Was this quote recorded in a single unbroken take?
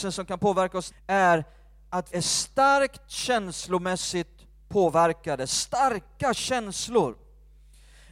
no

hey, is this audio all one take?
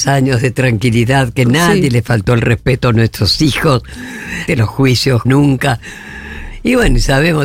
no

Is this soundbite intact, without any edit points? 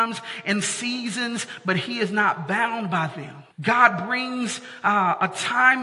no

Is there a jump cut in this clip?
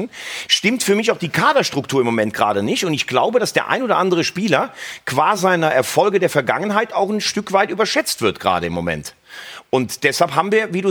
no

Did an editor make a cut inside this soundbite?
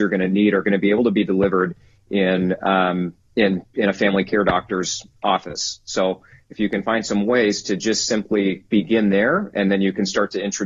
no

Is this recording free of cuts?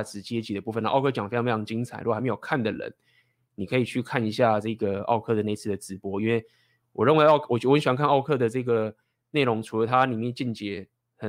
yes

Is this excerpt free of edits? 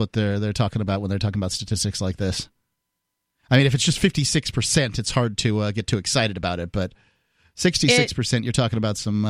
yes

